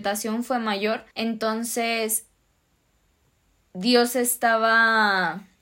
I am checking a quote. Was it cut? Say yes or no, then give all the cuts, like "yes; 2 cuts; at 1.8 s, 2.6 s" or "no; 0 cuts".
yes; 1 cut; at 1.1 s